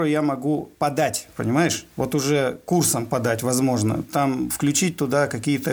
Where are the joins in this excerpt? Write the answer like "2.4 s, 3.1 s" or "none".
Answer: none